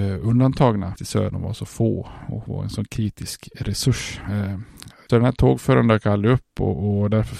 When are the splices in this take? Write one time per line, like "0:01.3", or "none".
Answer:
0:01.0
0:01.3
0:05.1

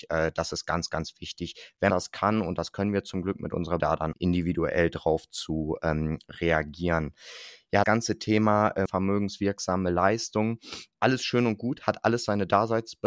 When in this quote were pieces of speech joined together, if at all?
0:01.9
0:03.8
0:04.1
0:07.8
0:08.9
0:10.9

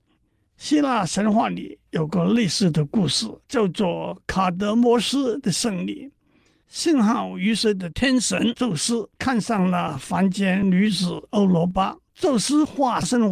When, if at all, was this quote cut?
0:03.4
0:09.2
0:12.1

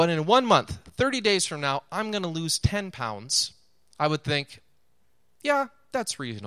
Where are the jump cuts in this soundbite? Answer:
none

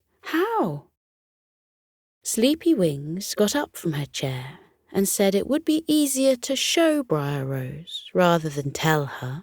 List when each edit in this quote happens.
none

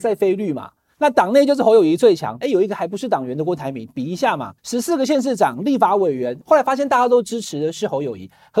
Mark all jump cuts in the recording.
0:02.4
0:04.6
0:06.4

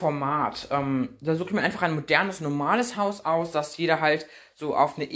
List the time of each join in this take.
none

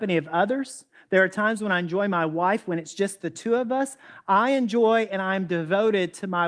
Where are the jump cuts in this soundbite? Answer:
none

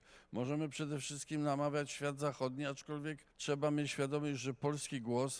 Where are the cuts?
0:03.3

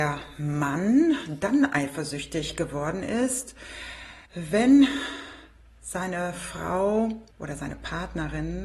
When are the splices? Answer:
0:04.3
0:07.3

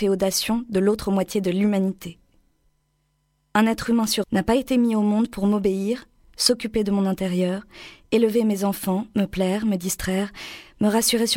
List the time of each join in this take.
0:04.2

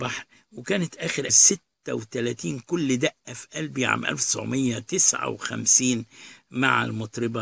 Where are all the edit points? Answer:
0:01.3

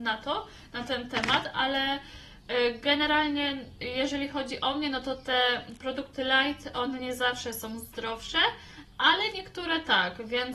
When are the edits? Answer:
none

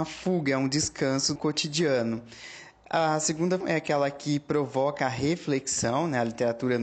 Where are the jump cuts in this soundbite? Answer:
0:01.4
0:03.6

